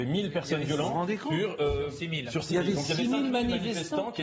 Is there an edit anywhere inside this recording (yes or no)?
no